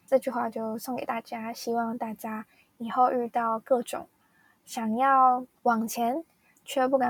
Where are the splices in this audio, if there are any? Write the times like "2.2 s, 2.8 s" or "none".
5.6 s